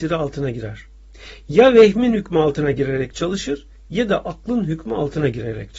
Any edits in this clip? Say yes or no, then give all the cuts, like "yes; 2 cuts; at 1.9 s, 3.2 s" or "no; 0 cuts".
no; 0 cuts